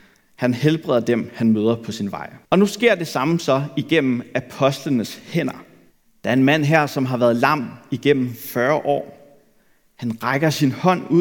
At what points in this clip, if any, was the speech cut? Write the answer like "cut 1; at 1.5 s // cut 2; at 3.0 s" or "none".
cut 1; at 2.4 s // cut 2; at 5.9 s